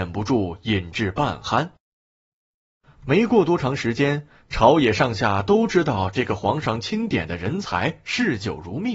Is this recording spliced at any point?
no; 0 cuts

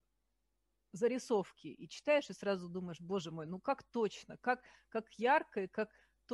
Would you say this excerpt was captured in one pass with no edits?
yes; 0 cuts

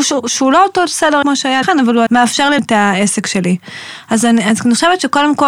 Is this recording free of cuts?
no; 4 cuts; at 1.2 s, 1.6 s, 2.1 s, 2.6 s

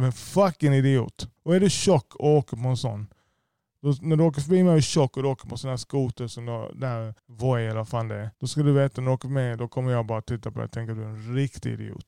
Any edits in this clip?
yes; 3 cuts; at 1.4 s, 7.2 s, 8.3 s

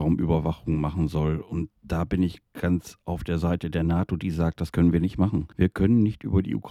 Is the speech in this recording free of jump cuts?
yes; 0 cuts

